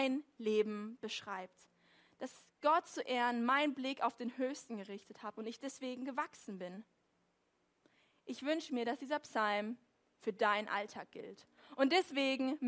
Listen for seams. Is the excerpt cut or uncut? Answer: uncut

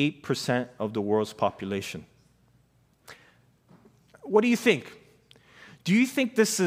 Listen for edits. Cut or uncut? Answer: uncut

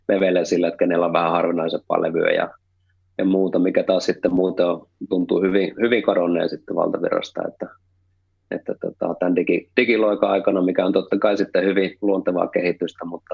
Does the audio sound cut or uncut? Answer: uncut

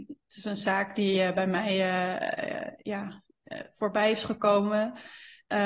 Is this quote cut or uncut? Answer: uncut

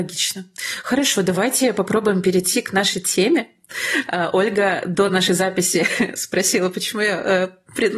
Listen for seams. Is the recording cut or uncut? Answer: uncut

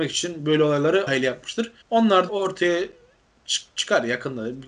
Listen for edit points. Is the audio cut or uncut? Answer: cut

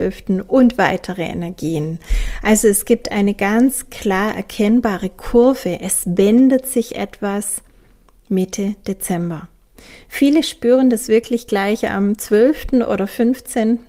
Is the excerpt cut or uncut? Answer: uncut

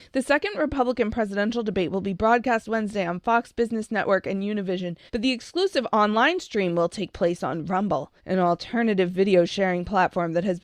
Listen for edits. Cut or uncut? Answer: cut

